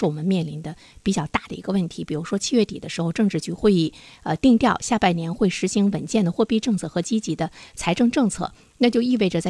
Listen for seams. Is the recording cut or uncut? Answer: uncut